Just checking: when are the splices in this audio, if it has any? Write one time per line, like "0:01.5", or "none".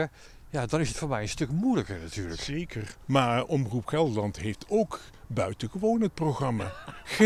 none